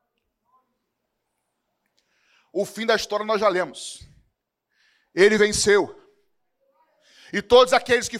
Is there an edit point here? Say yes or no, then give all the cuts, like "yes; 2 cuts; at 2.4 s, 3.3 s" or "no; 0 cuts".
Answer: no; 0 cuts